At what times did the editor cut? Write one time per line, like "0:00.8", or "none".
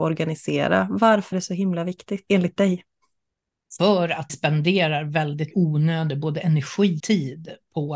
0:01.3
0:02.3
0:04.3
0:05.5
0:07.0

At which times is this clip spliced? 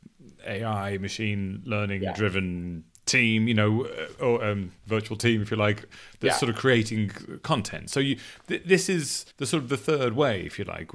0:04.8
0:09.3

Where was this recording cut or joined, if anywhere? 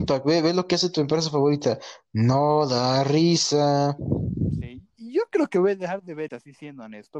0:06.3

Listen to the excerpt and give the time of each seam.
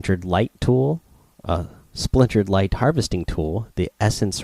none

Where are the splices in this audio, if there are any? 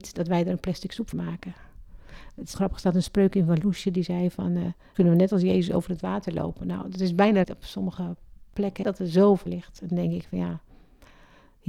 0:01.1
0:02.5
0:04.9
0:07.4
0:08.8
0:09.5

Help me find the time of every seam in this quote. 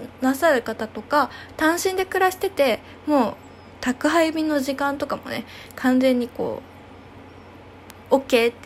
none

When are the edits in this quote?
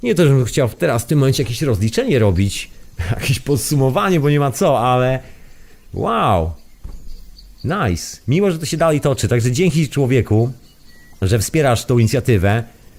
none

